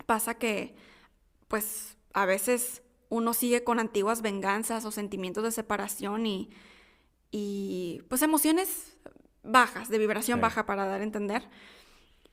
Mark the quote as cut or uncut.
uncut